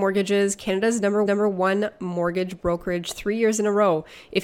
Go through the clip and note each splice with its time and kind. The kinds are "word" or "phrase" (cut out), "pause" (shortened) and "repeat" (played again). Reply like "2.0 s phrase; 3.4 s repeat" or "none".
1.3 s repeat